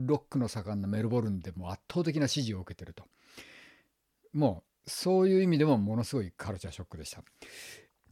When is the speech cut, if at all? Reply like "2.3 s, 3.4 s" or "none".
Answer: none